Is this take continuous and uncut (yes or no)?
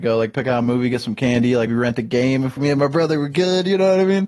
no